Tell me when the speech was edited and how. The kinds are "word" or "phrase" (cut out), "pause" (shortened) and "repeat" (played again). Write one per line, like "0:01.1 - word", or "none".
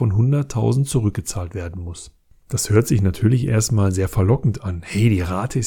none